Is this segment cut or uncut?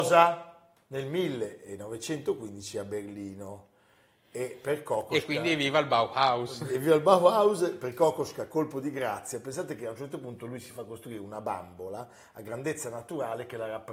uncut